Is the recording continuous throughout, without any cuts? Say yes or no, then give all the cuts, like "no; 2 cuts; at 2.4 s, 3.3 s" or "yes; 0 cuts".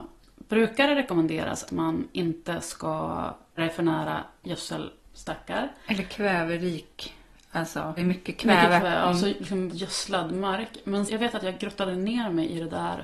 no; 6 cuts; at 1.7 s, 3.6 s, 8.0 s, 8.8 s, 9.7 s, 11.1 s